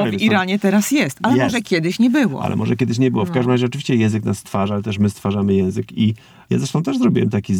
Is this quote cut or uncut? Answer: uncut